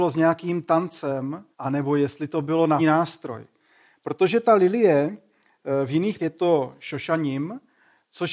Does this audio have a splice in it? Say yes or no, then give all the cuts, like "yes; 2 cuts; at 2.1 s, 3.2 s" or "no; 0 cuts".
yes; 3 cuts; at 1.5 s, 2.8 s, 6.2 s